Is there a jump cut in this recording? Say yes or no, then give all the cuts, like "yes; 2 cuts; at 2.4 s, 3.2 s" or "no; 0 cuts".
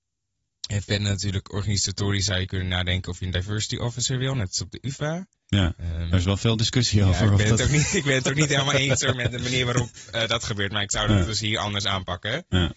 no; 0 cuts